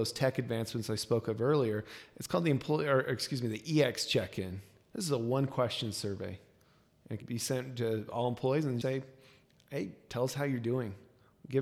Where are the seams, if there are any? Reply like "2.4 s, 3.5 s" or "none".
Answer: 7.2 s, 8.8 s

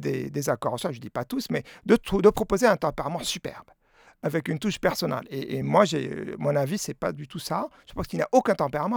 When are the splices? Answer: 5.6 s

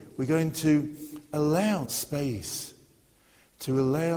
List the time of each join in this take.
1.8 s

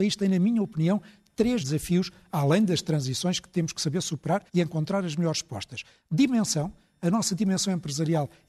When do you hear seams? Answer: 1.6 s, 4.5 s

